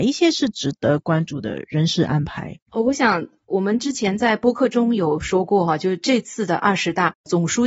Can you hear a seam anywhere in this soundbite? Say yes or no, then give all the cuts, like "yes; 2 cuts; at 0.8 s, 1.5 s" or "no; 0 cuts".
yes; 1 cut; at 2.6 s